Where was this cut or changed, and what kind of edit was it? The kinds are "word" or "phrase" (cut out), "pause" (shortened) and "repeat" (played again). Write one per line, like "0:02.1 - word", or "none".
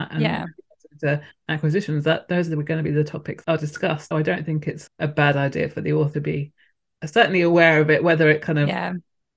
0:03.4 - word
0:04.1 - word
0:04.9 - word
0:06.1 - word